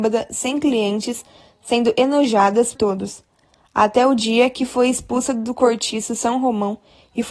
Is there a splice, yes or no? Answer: yes